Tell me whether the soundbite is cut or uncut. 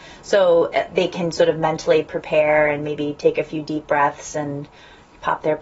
uncut